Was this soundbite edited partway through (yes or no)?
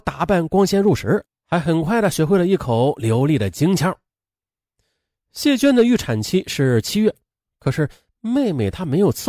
no